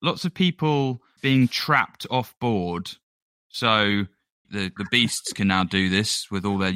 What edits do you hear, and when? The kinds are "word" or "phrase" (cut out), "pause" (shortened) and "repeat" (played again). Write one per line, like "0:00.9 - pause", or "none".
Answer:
0:01.2 - word
0:04.4 - word
0:04.8 - word